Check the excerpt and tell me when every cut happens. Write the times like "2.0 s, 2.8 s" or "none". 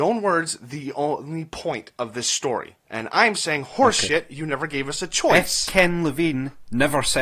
2.8 s